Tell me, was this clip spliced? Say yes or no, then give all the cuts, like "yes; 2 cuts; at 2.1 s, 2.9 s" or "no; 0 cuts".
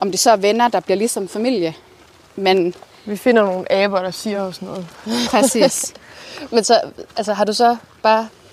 no; 0 cuts